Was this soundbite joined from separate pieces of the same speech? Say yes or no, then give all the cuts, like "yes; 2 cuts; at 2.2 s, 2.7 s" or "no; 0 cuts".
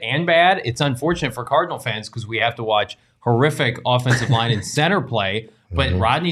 no; 0 cuts